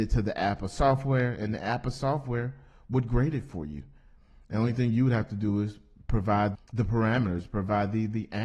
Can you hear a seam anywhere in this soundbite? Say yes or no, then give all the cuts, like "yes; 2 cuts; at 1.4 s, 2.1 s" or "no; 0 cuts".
yes; 1 cut; at 6.5 s